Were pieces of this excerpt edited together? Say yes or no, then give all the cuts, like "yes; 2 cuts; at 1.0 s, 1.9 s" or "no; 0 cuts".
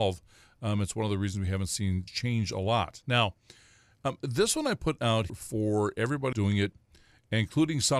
yes; 3 cuts; at 2.1 s, 5.3 s, 6.3 s